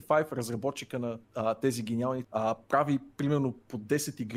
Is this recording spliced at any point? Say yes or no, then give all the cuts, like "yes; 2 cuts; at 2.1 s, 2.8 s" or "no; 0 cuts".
yes; 2 cuts; at 1.2 s, 2.2 s